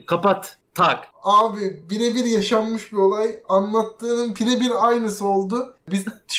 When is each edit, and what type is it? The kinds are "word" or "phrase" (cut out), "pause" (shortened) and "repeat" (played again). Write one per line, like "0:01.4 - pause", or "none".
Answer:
none